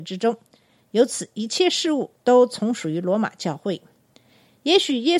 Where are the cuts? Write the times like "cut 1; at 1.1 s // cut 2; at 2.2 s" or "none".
cut 1; at 2.2 s